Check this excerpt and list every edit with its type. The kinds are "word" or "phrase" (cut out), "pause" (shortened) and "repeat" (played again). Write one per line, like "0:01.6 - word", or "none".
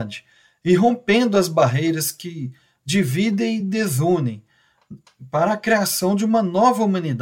none

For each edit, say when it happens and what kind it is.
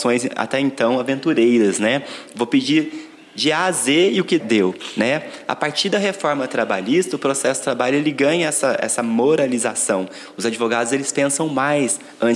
0:04.4 - word

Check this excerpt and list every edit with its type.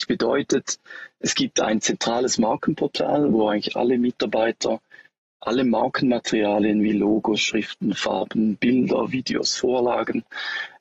none

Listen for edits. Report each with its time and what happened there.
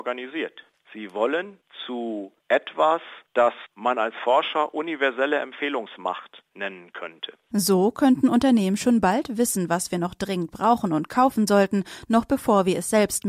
none

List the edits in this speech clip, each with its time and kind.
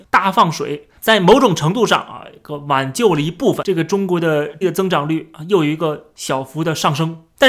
0:04.6 - word

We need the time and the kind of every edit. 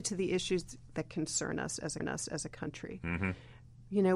0:02.0 - repeat

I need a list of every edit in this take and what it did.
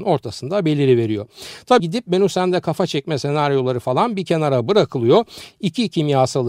0:01.8 - word

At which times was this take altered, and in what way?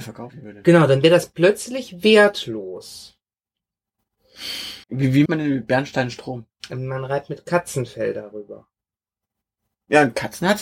0:04.8 - pause
0:05.3 - word

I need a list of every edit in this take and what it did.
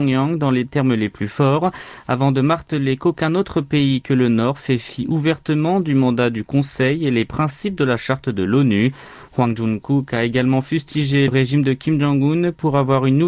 0:11.3 - word

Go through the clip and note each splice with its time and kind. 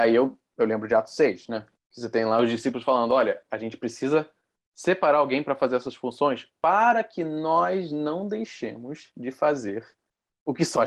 none

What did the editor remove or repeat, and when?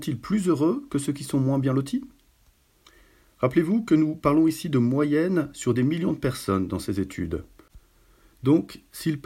none

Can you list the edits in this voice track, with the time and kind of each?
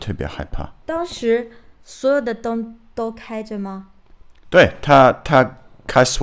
0:01.8 - pause

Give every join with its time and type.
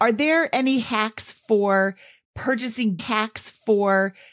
0:03.0 - repeat

